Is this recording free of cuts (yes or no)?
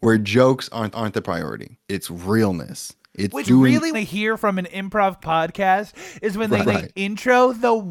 no